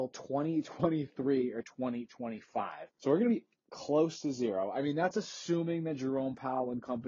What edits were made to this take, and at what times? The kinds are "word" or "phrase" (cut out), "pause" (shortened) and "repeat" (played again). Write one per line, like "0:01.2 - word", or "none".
0:02.9 - pause